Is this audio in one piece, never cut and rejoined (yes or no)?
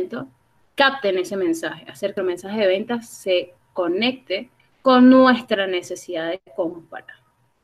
no